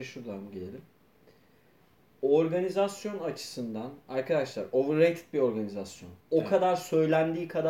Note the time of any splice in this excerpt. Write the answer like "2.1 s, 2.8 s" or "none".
6.2 s